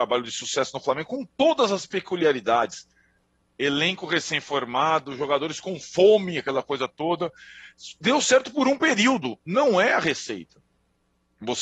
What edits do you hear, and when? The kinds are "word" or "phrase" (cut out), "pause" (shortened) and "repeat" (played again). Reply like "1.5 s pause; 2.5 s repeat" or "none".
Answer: none

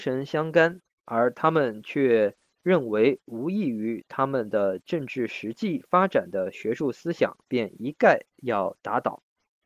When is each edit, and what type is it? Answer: 7.4 s pause

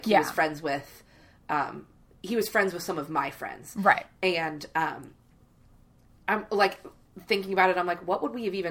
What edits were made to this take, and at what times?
none

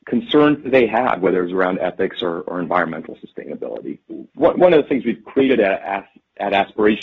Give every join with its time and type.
4.3 s pause

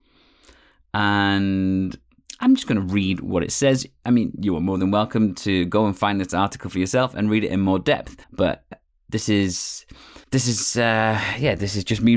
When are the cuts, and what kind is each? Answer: 8.2 s pause; 10.2 s pause

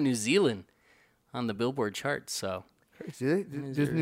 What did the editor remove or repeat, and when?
none

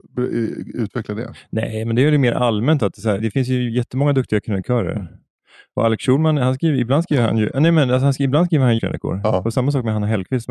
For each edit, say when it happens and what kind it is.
3.2 s word; 8.8 s word

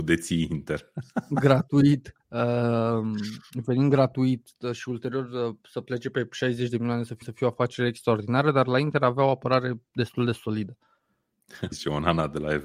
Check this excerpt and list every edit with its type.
2.2 s pause; 7.2 s repeat; 11.7 s word

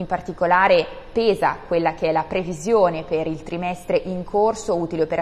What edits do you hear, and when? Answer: none

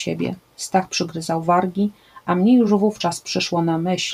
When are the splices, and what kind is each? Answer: none

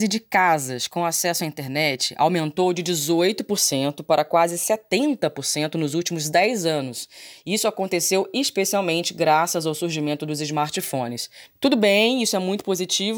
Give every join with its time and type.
11.5 s pause

